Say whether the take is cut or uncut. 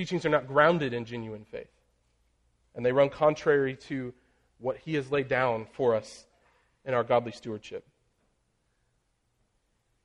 uncut